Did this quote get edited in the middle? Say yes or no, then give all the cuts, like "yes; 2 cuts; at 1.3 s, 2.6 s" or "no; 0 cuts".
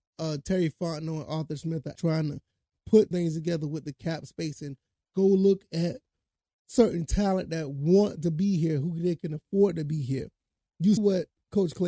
yes; 3 cuts; at 1.9 s, 3.1 s, 11.0 s